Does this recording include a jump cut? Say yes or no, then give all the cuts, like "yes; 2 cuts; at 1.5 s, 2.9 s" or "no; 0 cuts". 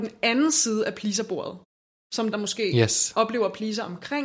yes; 1 cut; at 2.3 s